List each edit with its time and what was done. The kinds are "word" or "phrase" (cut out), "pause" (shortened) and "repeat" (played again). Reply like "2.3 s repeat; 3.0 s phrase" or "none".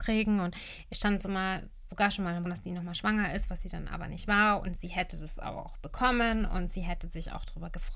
2.5 s word